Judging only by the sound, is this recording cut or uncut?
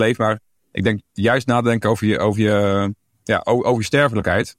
uncut